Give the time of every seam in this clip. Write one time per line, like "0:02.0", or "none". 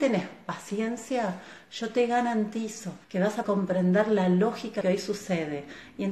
0:03.0
0:03.4
0:04.8